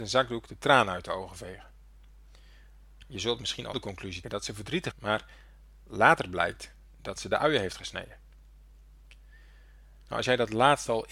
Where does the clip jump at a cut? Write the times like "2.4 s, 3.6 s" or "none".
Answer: 3.7 s, 4.2 s, 4.9 s